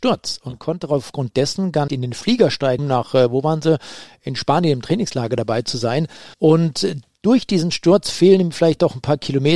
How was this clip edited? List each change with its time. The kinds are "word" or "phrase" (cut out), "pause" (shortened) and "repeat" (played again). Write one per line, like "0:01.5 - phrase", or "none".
0:01.9 - word
0:02.8 - word
0:06.3 - pause